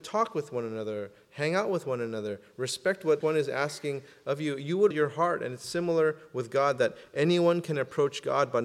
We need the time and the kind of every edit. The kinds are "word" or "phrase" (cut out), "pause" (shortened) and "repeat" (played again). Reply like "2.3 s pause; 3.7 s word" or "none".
3.2 s word; 4.9 s word